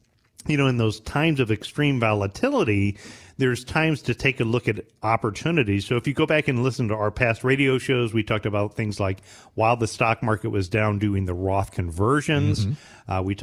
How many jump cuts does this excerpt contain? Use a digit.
0